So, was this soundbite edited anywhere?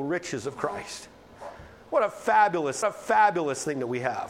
yes; 1 cut; at 2.8 s

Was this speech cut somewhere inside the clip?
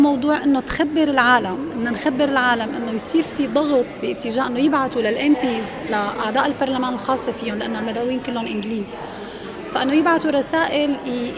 no; 0 cuts

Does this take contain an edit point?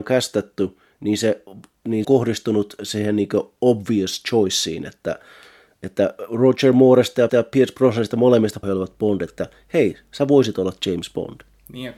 yes; 3 cuts; at 2.0 s, 7.3 s, 8.6 s

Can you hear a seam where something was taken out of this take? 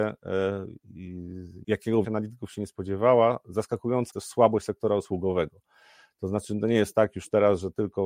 yes; 3 cuts; at 1.6 s, 2.0 s, 4.1 s

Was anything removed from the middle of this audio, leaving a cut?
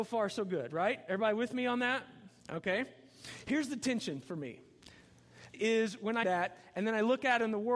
yes; 3 cuts; at 2.4 s, 5.5 s, 6.2 s

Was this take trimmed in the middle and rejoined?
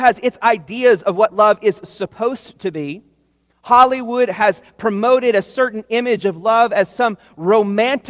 no; 0 cuts

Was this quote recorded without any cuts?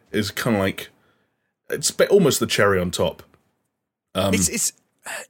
yes; 0 cuts

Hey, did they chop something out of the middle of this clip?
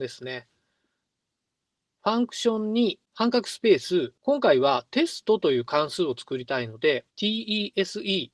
yes; 3 cuts; at 3.0 s, 4.2 s, 7.1 s

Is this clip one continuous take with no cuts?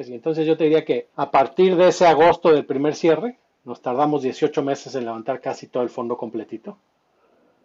no; 1 cut; at 1.1 s

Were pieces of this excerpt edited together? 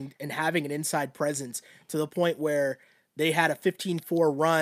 no; 0 cuts

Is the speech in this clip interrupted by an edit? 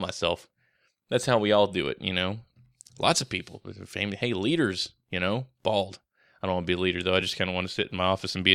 no; 0 cuts

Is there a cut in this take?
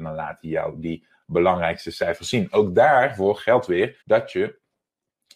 yes; 1 cut; at 4.0 s

